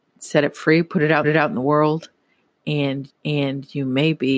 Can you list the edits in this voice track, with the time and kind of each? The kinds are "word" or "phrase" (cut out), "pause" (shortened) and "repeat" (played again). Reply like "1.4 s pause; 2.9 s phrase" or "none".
1.2 s repeat; 3.1 s repeat